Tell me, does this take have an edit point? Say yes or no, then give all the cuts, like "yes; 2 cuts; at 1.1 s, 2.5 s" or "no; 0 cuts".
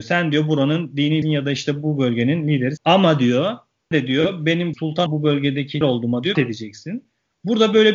yes; 7 cuts; at 1.2 s, 2.8 s, 3.9 s, 4.7 s, 5.1 s, 5.8 s, 6.3 s